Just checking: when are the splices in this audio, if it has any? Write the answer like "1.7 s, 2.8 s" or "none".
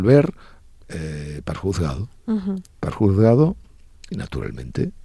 1.5 s, 2.9 s, 4.1 s